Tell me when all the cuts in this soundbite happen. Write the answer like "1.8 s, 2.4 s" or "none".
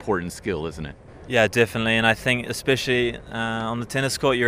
none